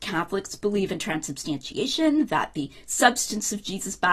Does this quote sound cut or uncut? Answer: uncut